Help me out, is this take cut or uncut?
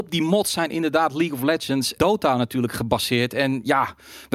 cut